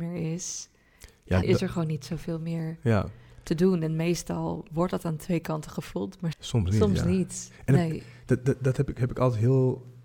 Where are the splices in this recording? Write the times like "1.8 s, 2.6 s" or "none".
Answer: 1.4 s, 6.3 s

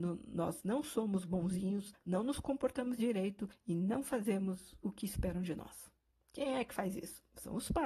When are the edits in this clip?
none

